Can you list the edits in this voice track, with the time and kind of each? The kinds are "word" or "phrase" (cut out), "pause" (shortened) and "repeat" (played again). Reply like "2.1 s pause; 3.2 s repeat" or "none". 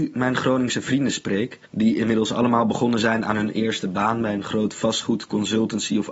1.7 s pause